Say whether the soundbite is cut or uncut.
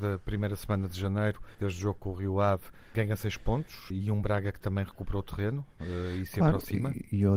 cut